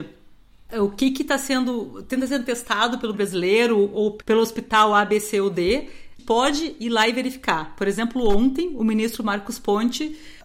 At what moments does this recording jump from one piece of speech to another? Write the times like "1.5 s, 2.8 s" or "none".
3.1 s, 6.2 s